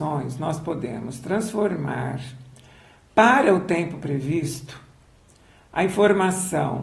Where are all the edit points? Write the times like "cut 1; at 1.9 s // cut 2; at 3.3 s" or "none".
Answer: none